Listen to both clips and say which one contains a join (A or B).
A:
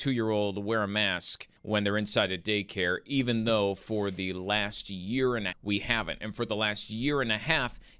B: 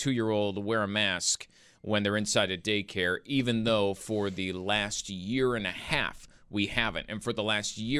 A